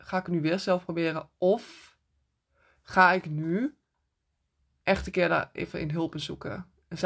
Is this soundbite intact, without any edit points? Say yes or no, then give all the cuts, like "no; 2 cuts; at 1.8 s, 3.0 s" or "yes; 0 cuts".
yes; 0 cuts